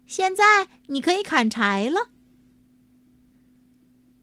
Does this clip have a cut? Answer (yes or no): no